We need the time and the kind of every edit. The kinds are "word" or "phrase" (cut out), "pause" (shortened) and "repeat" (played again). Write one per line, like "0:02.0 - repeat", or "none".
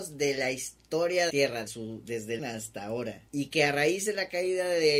0:01.3 - phrase
0:01.7 - word
0:02.4 - word
0:03.3 - pause